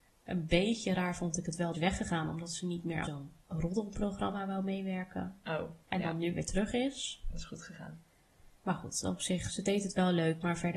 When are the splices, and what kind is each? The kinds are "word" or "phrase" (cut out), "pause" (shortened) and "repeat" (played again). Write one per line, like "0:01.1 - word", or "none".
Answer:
0:01.7 - phrase
0:03.0 - word
0:03.4 - pause
0:05.8 - pause
0:08.5 - pause
0:09.5 - word